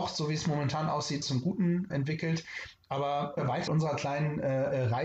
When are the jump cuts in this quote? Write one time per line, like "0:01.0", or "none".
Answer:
0:01.2
0:01.9
0:03.4
0:03.7